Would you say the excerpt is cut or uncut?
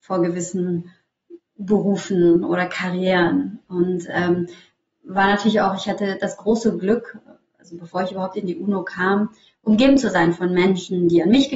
uncut